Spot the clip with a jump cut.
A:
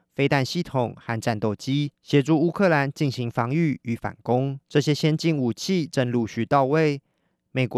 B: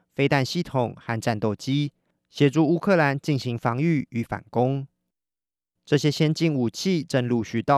A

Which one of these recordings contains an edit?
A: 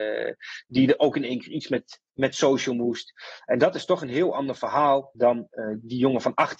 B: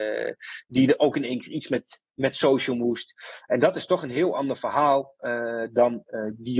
A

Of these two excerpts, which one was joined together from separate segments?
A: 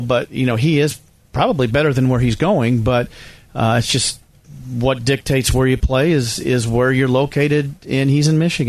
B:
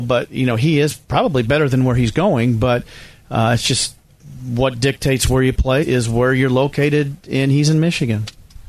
B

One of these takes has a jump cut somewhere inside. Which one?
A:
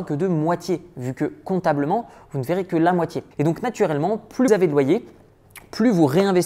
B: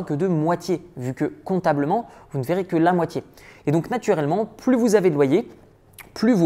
A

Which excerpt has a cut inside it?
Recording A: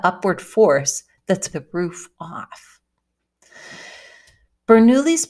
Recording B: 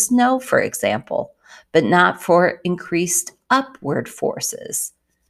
A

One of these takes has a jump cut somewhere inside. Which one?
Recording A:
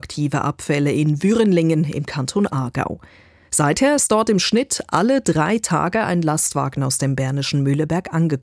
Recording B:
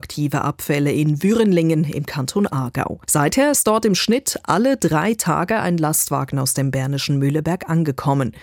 B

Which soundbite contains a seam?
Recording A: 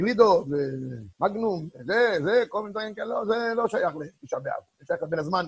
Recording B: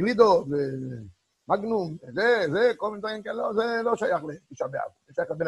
A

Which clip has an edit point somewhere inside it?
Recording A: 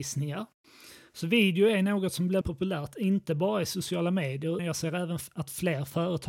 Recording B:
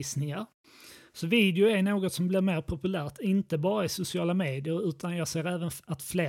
A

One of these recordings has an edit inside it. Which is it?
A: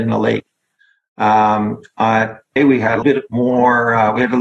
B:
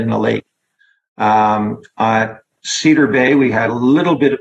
A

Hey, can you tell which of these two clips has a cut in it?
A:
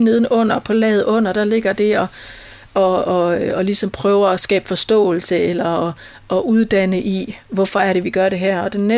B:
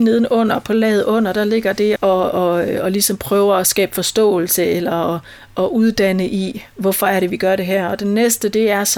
B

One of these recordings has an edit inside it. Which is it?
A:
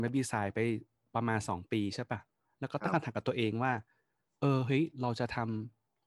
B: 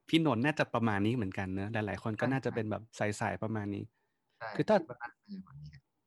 B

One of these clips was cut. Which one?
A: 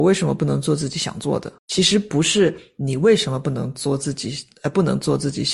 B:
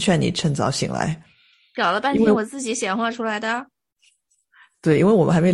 A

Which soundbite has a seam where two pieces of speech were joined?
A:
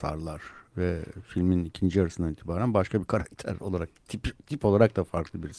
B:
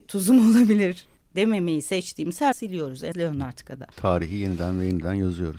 B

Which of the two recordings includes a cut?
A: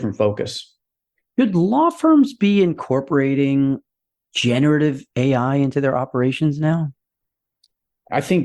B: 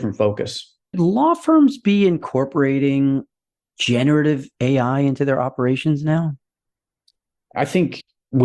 B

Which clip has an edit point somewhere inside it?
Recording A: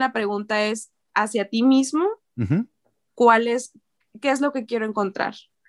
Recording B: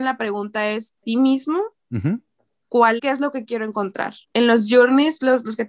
B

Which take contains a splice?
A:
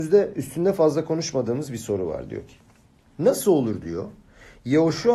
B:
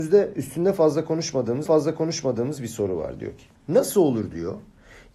B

